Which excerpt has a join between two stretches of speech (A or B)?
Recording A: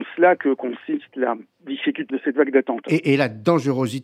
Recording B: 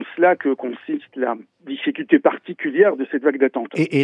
A